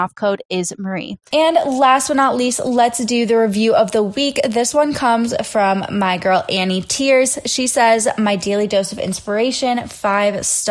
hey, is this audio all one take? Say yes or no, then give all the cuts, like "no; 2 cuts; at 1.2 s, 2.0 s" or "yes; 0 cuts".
yes; 0 cuts